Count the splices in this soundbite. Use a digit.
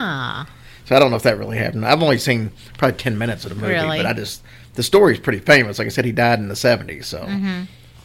0